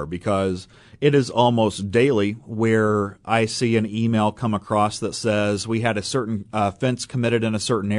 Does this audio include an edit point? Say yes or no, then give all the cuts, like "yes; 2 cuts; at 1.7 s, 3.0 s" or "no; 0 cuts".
no; 0 cuts